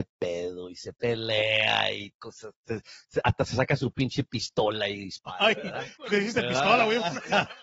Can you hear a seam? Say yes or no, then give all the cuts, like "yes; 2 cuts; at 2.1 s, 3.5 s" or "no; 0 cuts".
yes; 1 cut; at 6.1 s